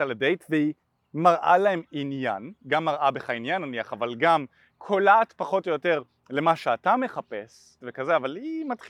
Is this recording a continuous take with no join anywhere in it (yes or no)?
no